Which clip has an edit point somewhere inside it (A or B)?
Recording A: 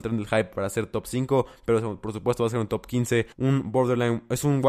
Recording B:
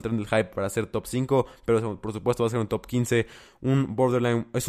A